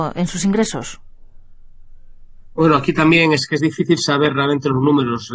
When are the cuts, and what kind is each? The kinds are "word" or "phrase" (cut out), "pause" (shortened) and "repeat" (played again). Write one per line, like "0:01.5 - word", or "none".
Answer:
none

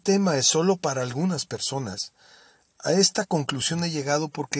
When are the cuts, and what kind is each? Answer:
none

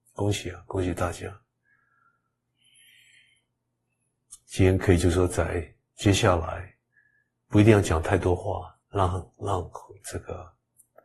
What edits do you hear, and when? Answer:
0:08.8 - pause

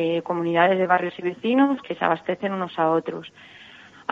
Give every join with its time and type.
0:01.8 - word

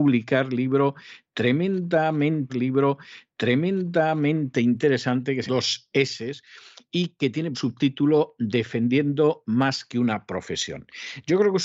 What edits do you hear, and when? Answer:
0:02.5 - repeat
0:05.5 - phrase
0:07.5 - word

